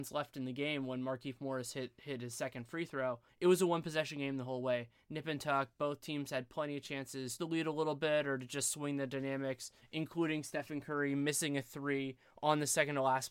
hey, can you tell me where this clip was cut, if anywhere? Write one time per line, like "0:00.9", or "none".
0:07.4